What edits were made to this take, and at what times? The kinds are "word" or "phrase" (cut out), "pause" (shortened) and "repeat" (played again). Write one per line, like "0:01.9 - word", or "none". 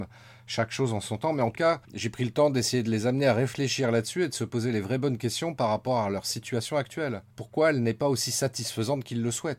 0:01.5 - word
0:01.8 - pause
0:07.3 - pause